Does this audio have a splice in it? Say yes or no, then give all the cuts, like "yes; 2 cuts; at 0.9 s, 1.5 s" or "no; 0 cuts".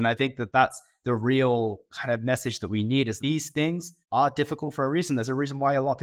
yes; 2 cuts; at 3.2 s, 4.0 s